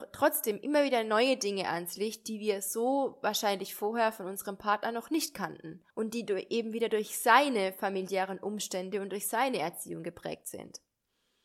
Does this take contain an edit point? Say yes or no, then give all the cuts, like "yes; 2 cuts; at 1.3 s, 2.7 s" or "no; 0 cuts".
yes; 1 cut; at 5.9 s